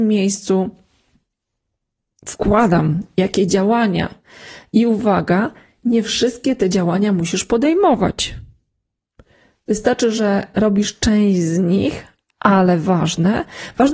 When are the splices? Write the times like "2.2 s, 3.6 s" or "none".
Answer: none